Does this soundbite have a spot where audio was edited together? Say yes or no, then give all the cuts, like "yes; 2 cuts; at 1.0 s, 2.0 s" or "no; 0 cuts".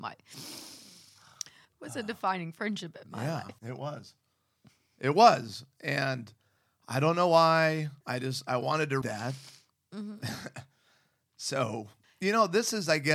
yes; 5 cuts; at 1.6 s, 3.6 s, 8.0 s, 9.0 s, 12.0 s